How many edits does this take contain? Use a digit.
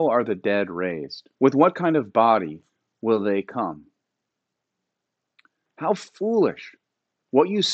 1